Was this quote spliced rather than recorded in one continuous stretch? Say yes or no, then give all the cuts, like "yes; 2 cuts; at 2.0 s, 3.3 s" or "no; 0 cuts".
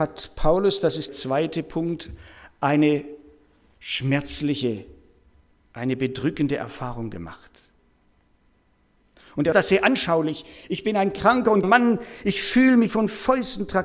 yes; 4 cuts; at 1.1 s, 9.5 s, 11.6 s, 12.9 s